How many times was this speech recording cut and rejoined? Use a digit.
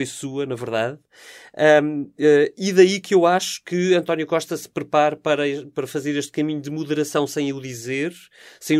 0